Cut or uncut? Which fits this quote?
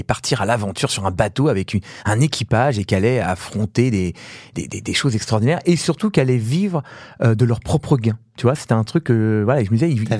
uncut